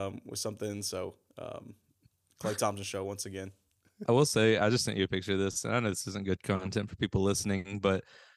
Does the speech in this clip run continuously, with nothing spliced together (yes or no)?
yes